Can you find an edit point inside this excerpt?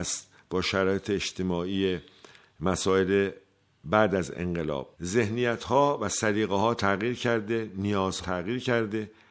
yes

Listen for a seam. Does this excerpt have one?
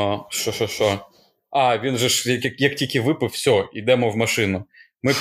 no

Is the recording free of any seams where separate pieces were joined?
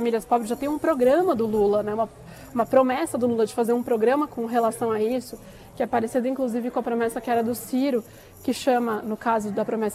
yes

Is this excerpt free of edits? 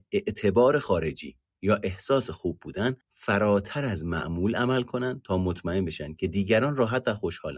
no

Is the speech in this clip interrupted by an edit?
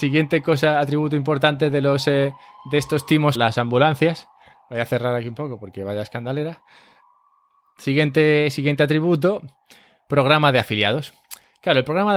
yes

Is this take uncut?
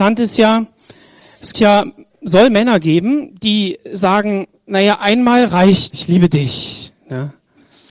no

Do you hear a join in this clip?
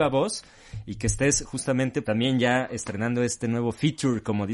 yes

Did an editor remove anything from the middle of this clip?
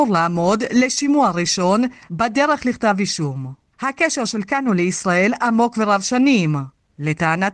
no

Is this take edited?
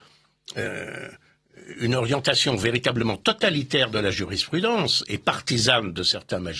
no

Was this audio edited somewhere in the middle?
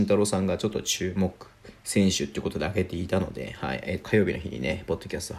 yes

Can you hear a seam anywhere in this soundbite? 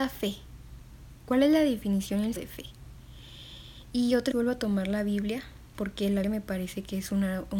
yes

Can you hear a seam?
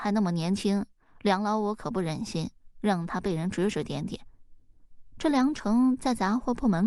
no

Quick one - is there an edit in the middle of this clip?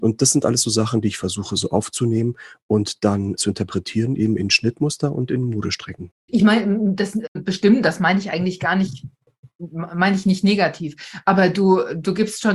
no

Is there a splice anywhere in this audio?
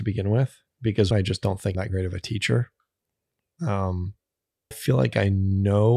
yes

